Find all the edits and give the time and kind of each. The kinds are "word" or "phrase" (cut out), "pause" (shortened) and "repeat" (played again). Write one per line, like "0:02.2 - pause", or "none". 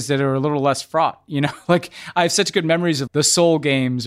0:03.1 - word